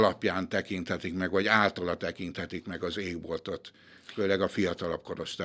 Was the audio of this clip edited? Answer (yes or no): no